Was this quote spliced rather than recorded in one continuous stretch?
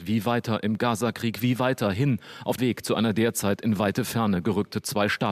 yes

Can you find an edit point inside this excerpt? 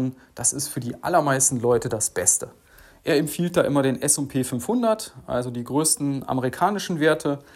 no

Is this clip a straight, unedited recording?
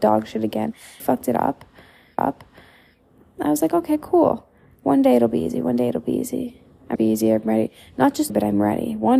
no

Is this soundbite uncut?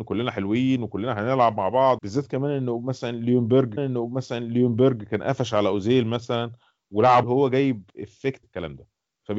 no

